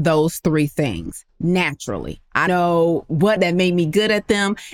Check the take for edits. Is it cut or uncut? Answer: cut